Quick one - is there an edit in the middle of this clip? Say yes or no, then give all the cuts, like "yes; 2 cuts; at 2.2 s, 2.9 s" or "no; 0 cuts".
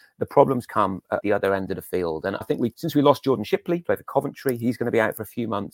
yes; 4 cuts; at 1.2 s, 2.4 s, 2.7 s, 3.8 s